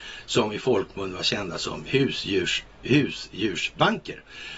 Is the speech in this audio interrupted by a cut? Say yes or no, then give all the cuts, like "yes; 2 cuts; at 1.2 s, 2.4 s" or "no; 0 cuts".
no; 0 cuts